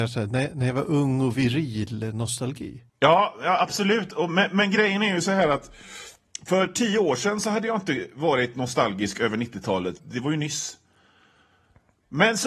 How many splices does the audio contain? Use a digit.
2